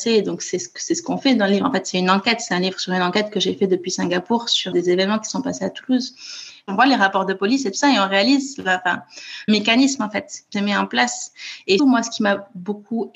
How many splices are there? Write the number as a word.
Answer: four